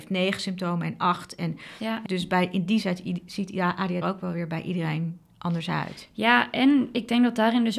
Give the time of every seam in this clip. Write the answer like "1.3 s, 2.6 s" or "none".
2.1 s, 2.8 s, 4.0 s